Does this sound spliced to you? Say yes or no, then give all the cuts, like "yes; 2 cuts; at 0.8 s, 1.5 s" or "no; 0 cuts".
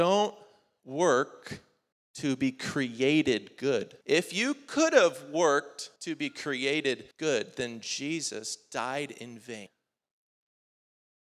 yes; 4 cuts; at 1.9 s, 4.0 s, 6.0 s, 7.1 s